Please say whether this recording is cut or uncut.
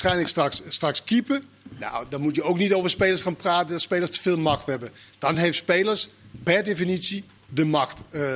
uncut